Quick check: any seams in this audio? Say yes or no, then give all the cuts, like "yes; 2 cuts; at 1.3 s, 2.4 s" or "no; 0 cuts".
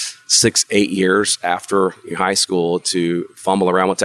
no; 0 cuts